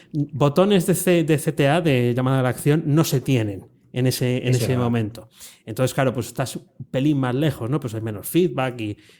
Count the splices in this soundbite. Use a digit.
0